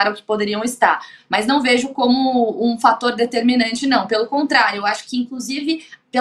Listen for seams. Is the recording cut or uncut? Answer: uncut